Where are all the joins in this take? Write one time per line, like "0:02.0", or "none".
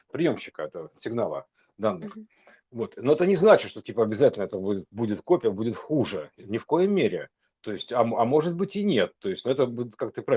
none